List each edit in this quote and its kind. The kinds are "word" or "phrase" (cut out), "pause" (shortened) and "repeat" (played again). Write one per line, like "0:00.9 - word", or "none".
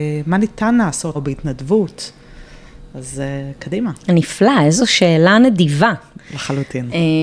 0:01.1 - word
0:04.0 - pause